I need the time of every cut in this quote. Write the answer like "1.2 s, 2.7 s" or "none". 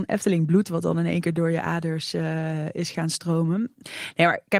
none